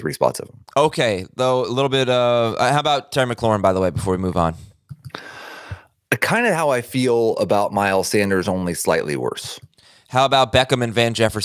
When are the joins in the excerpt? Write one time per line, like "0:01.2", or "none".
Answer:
none